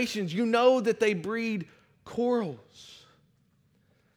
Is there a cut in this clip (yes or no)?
no